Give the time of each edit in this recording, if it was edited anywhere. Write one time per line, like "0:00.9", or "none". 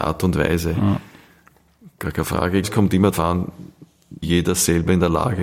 0:02.6
0:03.1
0:04.2